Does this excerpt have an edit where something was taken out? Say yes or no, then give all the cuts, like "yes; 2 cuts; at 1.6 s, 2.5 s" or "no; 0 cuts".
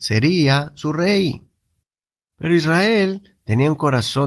no; 0 cuts